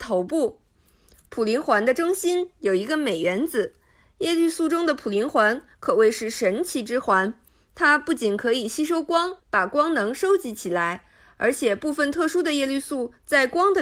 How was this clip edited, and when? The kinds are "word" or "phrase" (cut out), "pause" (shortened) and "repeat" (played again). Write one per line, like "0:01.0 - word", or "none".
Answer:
0:09.4 - pause